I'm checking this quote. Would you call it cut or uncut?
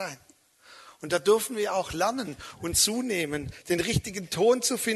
uncut